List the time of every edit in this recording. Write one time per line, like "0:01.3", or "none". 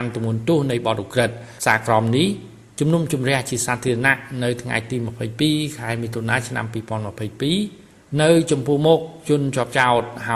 0:01.6